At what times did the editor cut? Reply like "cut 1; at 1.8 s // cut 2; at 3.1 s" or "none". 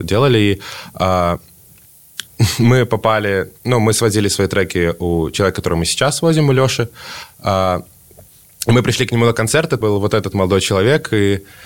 cut 1; at 2.3 s // cut 2; at 9.8 s